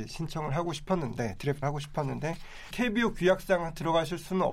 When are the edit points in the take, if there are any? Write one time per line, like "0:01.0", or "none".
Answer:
0:01.6
0:02.7